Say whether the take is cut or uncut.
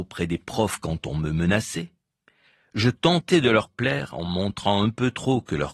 uncut